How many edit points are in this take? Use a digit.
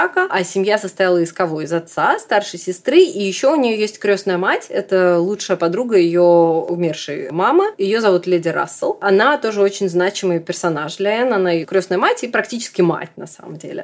0